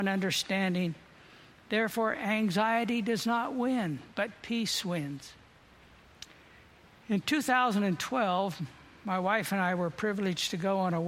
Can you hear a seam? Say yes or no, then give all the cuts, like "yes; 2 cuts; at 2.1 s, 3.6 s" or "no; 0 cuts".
no; 0 cuts